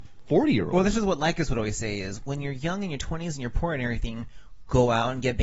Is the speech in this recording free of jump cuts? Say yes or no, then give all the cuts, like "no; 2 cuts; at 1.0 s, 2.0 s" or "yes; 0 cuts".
yes; 0 cuts